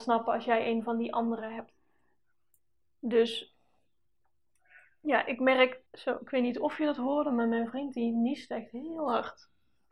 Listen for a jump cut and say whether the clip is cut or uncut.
cut